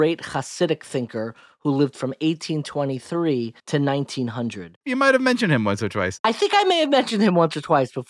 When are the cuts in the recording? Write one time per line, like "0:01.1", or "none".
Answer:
0:03.6